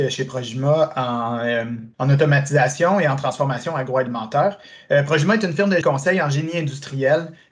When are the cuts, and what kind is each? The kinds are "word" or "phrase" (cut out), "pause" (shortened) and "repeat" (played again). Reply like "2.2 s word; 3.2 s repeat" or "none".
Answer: 1.9 s pause; 5.8 s word